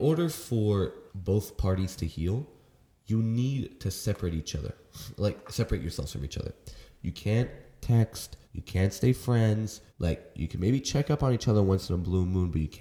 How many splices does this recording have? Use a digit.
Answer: 3